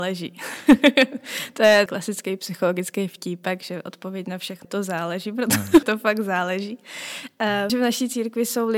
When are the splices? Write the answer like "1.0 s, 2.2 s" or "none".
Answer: 1.9 s, 4.6 s, 5.8 s, 7.7 s